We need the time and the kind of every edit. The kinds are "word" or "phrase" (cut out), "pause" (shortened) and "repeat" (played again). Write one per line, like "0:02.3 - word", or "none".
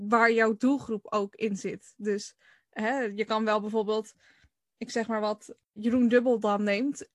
0:05.8 - word